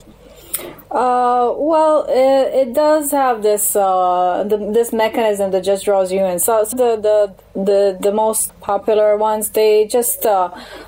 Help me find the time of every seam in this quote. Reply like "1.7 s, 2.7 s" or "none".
6.7 s, 8.5 s